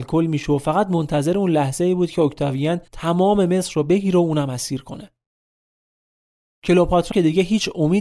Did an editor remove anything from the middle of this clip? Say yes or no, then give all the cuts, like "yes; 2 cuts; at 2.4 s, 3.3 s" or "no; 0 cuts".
yes; 2 cuts; at 2.9 s, 7.1 s